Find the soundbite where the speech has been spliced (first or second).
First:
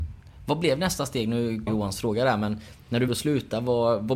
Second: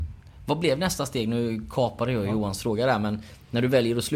first